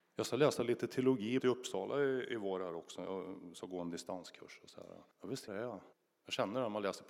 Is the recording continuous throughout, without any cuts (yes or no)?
no